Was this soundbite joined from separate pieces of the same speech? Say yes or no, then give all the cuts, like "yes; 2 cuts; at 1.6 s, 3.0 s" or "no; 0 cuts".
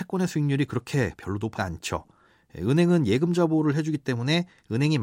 yes; 1 cut; at 1.6 s